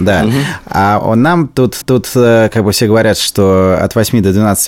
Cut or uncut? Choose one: cut